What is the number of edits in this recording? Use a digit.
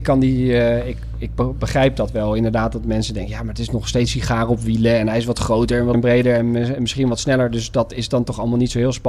3